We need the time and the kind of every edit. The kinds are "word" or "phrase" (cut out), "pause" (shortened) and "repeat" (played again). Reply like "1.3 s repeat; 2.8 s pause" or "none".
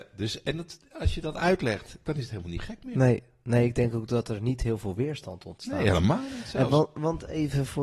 none